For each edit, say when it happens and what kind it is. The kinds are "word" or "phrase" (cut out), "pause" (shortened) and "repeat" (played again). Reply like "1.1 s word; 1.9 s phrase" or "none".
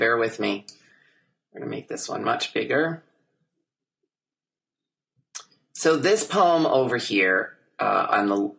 none